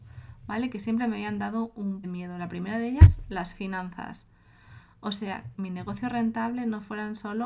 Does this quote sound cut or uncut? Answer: cut